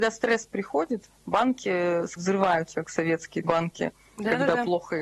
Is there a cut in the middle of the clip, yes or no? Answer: yes